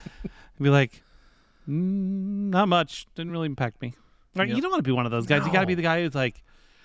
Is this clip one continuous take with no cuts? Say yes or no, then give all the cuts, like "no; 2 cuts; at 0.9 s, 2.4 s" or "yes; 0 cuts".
yes; 0 cuts